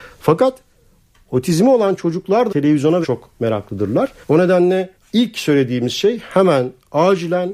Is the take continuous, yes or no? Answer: no